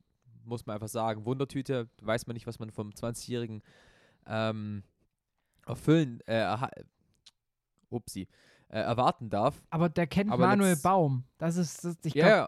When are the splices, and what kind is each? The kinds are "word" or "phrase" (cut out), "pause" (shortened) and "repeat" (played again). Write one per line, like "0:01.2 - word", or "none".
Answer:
none